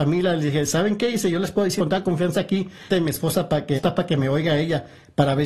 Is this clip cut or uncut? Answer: cut